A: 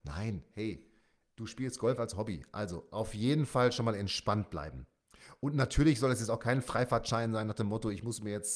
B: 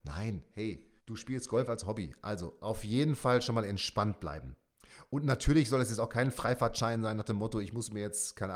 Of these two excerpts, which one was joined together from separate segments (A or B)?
B